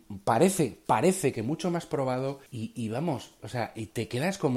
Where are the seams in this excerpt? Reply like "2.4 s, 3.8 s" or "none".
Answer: 2.5 s